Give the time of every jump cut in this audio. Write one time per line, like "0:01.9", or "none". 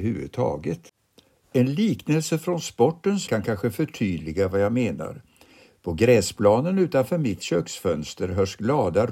0:03.3

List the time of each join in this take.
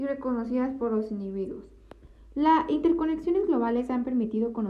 none

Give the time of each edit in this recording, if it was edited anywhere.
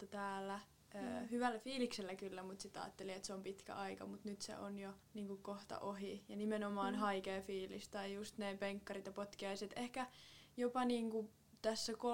0:05.0

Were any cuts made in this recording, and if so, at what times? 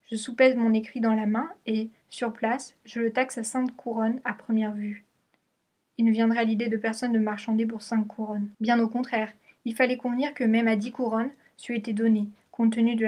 0:08.5

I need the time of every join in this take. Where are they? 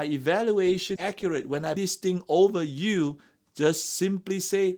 0:01.0
0:01.8

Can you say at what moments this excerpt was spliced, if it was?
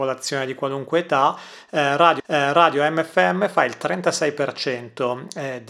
0:02.2

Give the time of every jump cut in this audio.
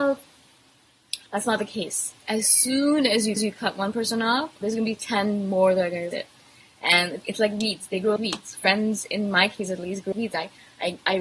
0:01.3
0:03.4
0:04.6
0:06.1
0:07.2
0:08.2
0:10.1

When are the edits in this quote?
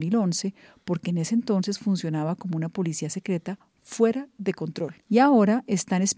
0:05.0

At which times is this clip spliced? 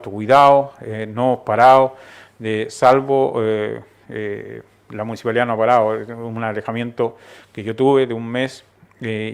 none

